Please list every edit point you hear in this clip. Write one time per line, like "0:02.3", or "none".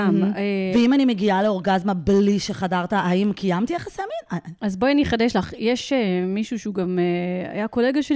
0:04.6